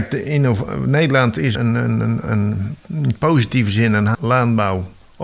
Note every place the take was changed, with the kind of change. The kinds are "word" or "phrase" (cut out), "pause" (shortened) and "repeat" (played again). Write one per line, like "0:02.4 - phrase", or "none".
0:01.5 - word
0:02.8 - pause
0:04.1 - word